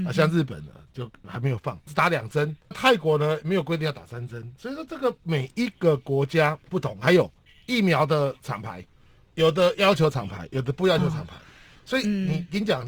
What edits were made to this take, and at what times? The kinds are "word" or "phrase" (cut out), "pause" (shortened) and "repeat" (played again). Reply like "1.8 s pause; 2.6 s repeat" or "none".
1.9 s phrase; 6.6 s pause; 7.4 s pause